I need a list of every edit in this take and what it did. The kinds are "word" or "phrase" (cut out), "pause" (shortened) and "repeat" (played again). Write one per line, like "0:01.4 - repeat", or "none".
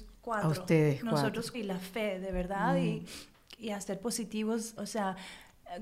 0:01.5 - word
0:03.6 - word
0:04.8 - word